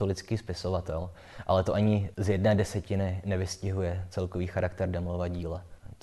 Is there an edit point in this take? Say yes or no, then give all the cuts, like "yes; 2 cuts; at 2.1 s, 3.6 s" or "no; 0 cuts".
no; 0 cuts